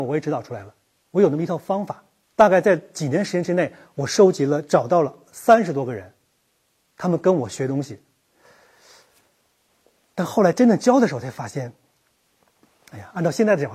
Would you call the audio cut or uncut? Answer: cut